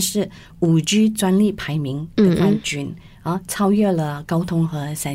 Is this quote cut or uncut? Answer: uncut